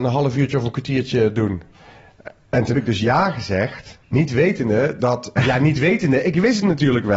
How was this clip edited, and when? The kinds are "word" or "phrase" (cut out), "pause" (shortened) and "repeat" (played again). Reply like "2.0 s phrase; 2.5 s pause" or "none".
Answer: 2.7 s word; 4.0 s pause; 5.4 s word